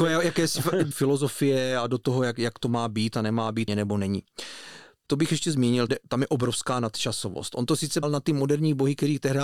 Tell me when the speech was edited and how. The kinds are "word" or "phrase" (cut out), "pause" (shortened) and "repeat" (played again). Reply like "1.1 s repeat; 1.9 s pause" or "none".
0.9 s word; 3.7 s phrase; 5.1 s word; 5.9 s word; 8.0 s word